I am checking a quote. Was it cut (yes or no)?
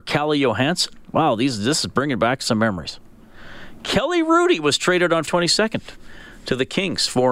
yes